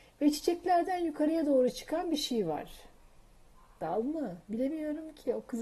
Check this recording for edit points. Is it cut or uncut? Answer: uncut